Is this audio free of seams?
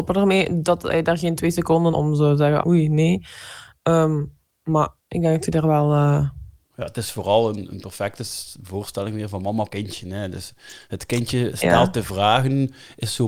no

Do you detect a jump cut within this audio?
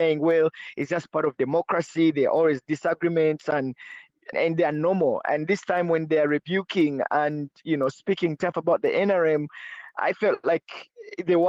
yes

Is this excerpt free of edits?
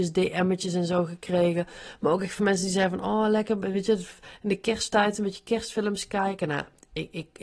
yes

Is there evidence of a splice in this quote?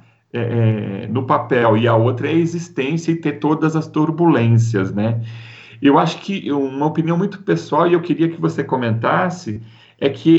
no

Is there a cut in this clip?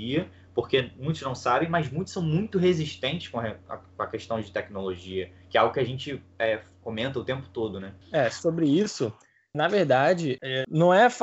yes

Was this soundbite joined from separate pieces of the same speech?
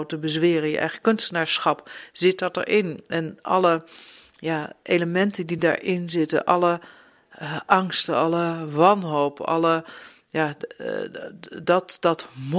no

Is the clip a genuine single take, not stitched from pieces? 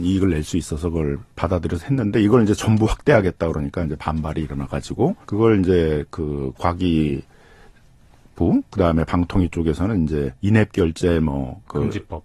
no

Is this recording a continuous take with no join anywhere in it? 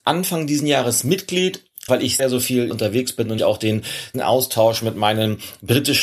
no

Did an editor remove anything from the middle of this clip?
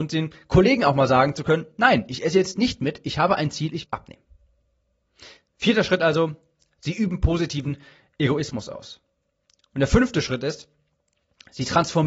yes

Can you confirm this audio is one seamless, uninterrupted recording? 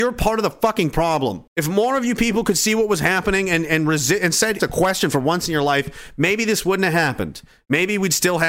no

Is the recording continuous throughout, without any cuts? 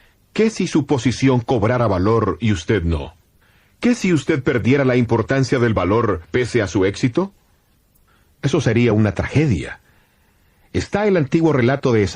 yes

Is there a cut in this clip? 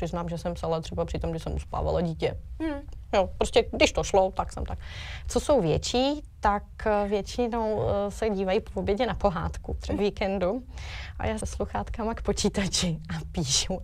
yes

